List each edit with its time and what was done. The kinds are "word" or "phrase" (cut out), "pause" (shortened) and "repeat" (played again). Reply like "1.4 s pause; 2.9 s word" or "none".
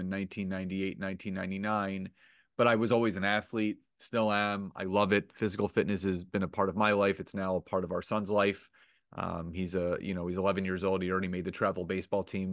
none